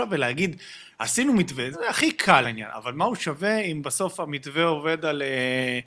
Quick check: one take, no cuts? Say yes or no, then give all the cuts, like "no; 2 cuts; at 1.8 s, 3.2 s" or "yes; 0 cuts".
no; 2 cuts; at 1.7 s, 2.4 s